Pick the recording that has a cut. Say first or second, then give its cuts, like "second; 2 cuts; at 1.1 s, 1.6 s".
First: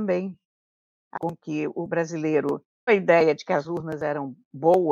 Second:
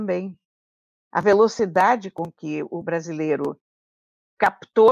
first; 2 cuts; at 1.1 s, 2.9 s